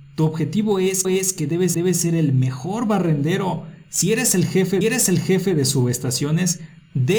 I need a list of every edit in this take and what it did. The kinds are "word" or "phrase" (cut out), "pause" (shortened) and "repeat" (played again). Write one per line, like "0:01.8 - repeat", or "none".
0:01.0 - repeat
0:01.7 - repeat
0:04.8 - repeat